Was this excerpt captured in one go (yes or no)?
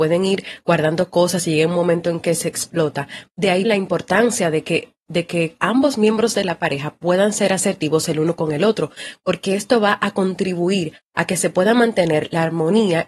no